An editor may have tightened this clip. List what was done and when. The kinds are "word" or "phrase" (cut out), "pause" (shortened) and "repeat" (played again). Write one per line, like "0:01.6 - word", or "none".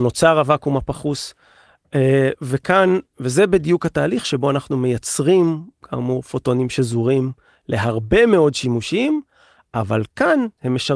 none